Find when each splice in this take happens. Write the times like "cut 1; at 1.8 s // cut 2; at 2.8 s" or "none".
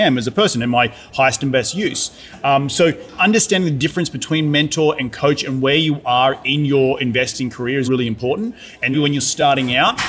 cut 1; at 7.8 s // cut 2; at 8.9 s